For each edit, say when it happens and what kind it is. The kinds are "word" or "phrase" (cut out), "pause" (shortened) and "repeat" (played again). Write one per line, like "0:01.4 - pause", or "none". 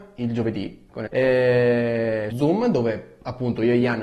0:01.1 - word
0:02.3 - word